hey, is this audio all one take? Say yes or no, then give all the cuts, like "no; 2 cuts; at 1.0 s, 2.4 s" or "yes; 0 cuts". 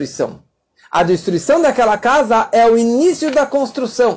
yes; 0 cuts